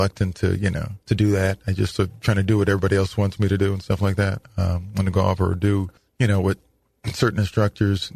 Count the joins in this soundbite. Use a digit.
2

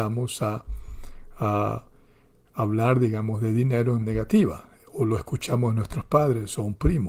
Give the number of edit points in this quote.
1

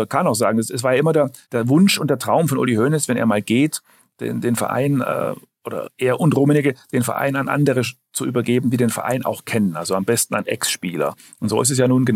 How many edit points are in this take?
1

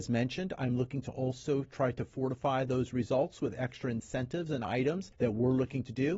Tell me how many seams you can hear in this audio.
1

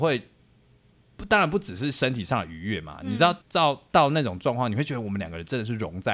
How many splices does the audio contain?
1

